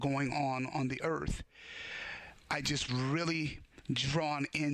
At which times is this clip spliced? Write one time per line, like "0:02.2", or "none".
0:02.9